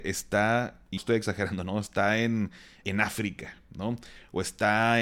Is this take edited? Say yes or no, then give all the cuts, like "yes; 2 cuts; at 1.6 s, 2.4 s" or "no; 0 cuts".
yes; 2 cuts; at 1.0 s, 2.8 s